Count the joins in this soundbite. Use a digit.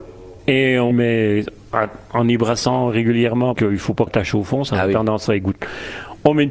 3